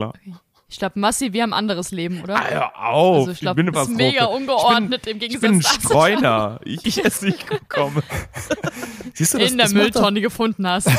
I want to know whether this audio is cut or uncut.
cut